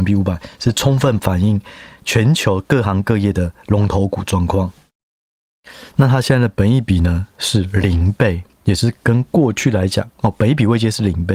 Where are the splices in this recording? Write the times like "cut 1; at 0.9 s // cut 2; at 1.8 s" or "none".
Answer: cut 1; at 8.5 s